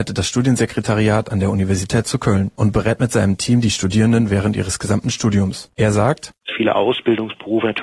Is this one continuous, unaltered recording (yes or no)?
yes